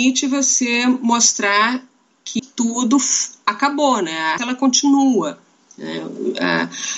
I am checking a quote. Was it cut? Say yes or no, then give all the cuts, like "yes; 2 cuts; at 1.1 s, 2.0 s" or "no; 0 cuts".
yes; 2 cuts; at 2.4 s, 4.4 s